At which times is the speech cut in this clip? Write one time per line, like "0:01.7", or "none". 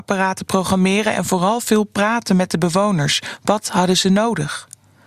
none